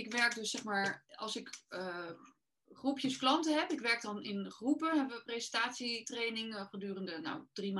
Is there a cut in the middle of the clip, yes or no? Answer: no